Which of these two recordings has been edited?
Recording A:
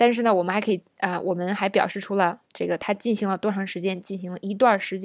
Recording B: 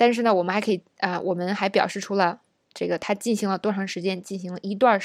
A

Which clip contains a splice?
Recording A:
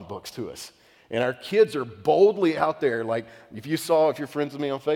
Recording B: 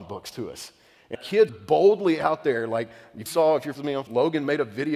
B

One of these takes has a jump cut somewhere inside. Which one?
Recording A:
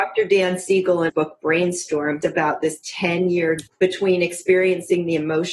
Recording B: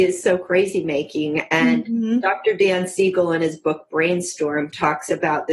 A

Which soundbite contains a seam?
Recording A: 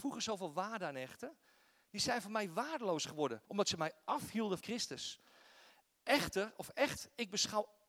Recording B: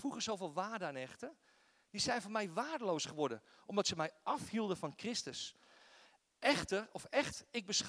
A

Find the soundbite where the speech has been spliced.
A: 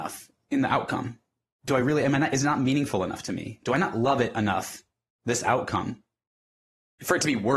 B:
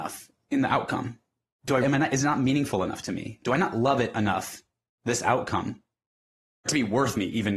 B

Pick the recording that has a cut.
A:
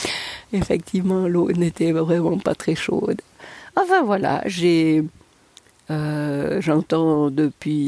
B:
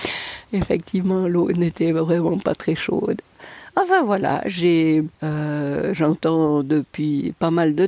B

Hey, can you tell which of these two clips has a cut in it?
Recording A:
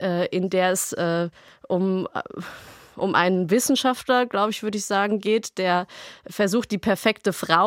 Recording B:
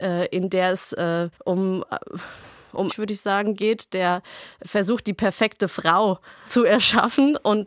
B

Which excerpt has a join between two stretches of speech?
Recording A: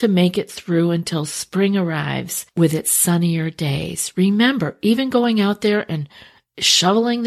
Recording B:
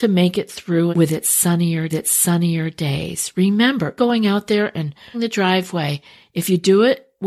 B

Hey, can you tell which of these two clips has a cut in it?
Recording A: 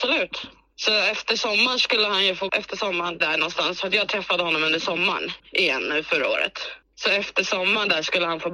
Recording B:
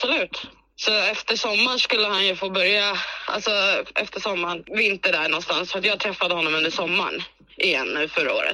A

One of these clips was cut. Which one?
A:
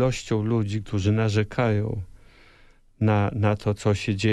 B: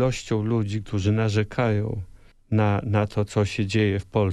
B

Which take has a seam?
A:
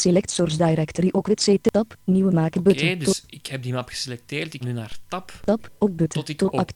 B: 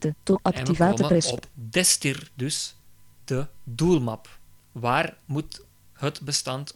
A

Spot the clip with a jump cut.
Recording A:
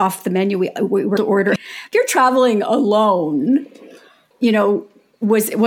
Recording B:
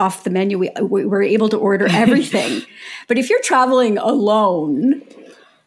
A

